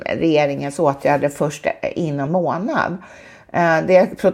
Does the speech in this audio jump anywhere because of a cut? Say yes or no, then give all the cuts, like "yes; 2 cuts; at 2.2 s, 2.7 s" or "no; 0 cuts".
yes; 1 cut; at 2.3 s